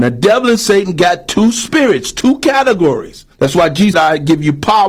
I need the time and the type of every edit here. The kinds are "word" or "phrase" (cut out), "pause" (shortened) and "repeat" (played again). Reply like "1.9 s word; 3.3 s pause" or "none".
3.3 s pause; 3.9 s word